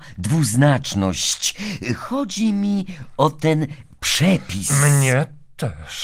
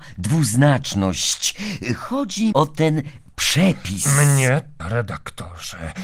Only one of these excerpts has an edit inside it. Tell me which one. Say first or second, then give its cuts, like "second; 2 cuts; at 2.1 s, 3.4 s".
second; 2 cuts; at 2.5 s, 4.8 s